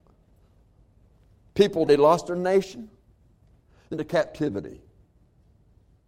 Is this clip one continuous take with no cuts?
no; 2 cuts; at 1.9 s, 3.9 s

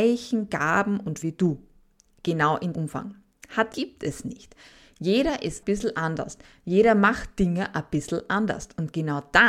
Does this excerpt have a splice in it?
yes; 4 cuts; at 1.2 s, 2.7 s, 3.7 s, 5.6 s

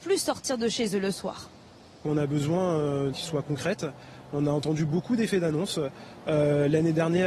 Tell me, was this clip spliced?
yes; 1 cut; at 3.1 s

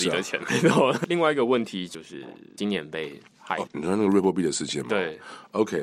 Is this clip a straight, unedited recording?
no; 2 cuts; at 3.3 s, 3.7 s

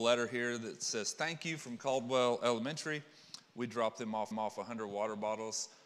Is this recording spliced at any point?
yes; 1 cut; at 4.3 s

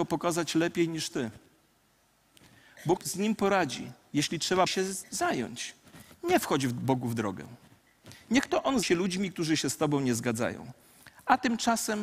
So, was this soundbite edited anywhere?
yes; 4 cuts; at 3.0 s, 4.7 s, 5.0 s, 8.8 s

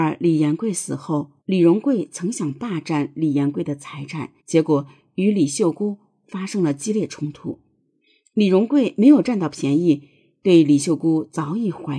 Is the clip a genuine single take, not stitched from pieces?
no; 2 cuts; at 1.4 s, 4.4 s

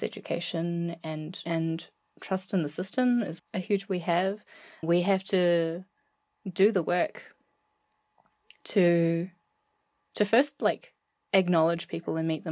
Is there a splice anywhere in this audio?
yes; 3 cuts; at 1.4 s, 3.4 s, 3.9 s

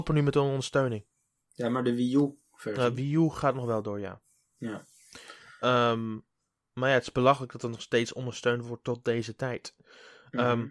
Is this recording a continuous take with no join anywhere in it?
yes; 0 cuts

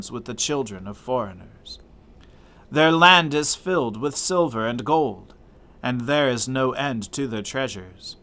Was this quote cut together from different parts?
no; 0 cuts

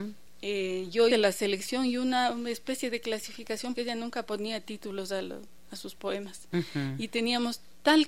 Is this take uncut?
no; 2 cuts; at 1.1 s, 3.7 s

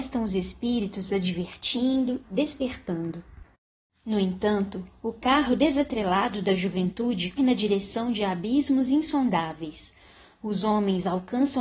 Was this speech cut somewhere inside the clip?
yes; 2 cuts; at 2.2 s, 7.4 s

